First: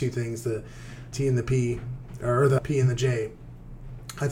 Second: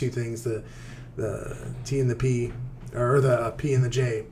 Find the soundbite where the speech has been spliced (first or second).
first